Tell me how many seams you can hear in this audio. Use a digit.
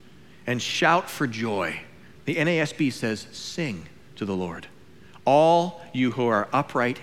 0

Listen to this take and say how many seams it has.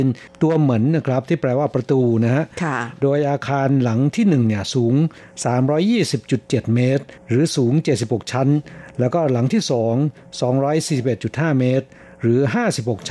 1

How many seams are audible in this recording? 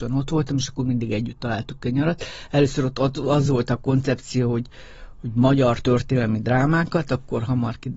0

